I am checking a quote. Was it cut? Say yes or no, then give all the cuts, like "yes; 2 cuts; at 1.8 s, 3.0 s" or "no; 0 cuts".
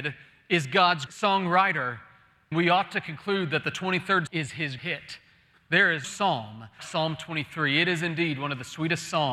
yes; 6 cuts; at 1.1 s, 2.5 s, 4.3 s, 4.8 s, 6.0 s, 6.8 s